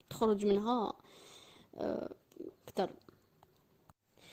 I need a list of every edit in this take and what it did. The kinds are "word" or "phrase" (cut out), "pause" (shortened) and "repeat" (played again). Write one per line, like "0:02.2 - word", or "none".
0:02.5 - word